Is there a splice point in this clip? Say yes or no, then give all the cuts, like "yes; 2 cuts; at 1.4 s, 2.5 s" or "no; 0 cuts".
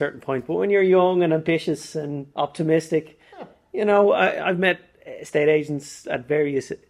no; 0 cuts